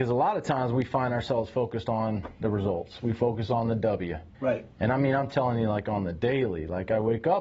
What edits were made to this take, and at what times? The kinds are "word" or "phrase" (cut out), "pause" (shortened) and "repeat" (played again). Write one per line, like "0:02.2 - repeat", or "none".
0:02.4 - pause
0:04.3 - pause

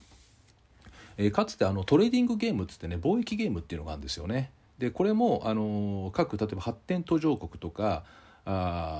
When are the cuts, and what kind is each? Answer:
none

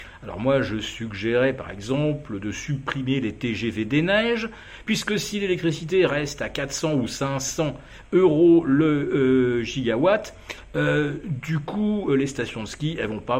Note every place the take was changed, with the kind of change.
none

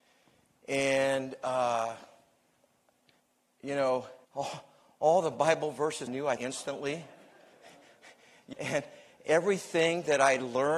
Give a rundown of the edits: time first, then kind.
0:03.2 - pause
0:04.2 - pause
0:06.1 - word
0:06.4 - phrase
0:08.5 - word

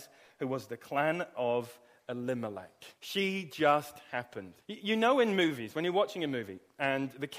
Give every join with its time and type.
0:03.0 - pause
0:04.6 - pause

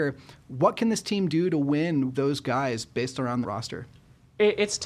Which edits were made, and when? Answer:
0:02.1 - word
0:03.4 - phrase

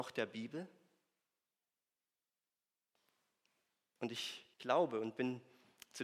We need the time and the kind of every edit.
0:04.5 - pause

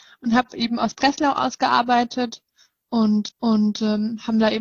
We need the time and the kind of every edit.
0:03.3 - repeat

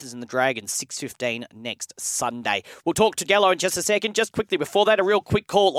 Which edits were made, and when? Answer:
0:03.2 - word

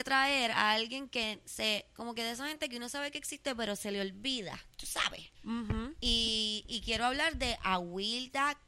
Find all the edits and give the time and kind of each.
0:04.7 - pause
0:05.3 - pause

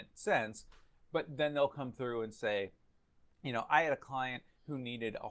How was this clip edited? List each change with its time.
none

